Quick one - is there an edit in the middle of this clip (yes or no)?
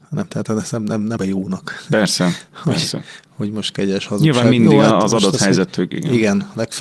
yes